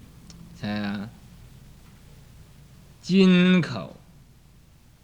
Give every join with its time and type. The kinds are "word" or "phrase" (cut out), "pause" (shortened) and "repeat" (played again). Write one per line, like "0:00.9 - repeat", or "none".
none